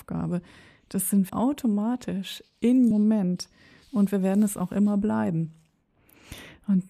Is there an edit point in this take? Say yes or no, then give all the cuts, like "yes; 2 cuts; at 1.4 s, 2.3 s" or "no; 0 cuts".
yes; 2 cuts; at 1.3 s, 2.9 s